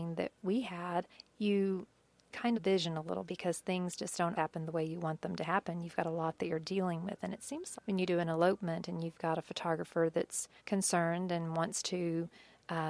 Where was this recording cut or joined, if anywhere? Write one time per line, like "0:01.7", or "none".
0:01.1
0:02.5
0:03.3
0:04.3
0:07.7
0:10.6